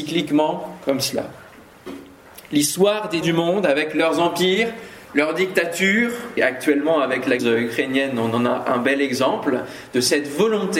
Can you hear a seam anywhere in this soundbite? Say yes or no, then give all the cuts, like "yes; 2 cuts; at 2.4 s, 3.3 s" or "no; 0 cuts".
yes; 3 cuts; at 3.2 s, 6.4 s, 7.4 s